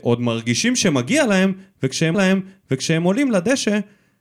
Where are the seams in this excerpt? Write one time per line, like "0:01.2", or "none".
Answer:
0:02.1